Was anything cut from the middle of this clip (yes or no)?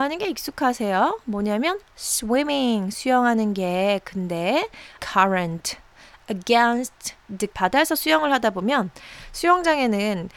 yes